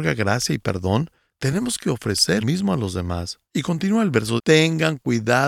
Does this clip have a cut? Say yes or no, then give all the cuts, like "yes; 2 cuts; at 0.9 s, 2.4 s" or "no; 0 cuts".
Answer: yes; 3 cuts; at 2.4 s, 3.5 s, 4.4 s